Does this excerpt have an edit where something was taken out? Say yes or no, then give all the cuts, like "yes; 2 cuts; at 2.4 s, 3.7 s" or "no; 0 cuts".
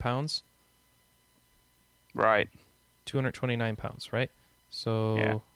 no; 0 cuts